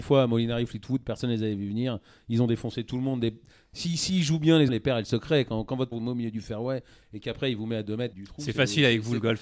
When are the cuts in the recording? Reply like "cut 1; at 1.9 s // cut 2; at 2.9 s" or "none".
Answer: cut 1; at 4.7 s // cut 2; at 5.9 s // cut 3; at 8.1 s